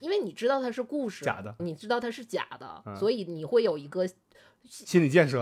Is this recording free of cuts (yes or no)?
no